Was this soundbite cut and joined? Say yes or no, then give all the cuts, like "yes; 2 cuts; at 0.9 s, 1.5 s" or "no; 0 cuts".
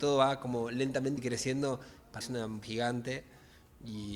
yes; 3 cuts; at 1.2 s, 2.2 s, 2.6 s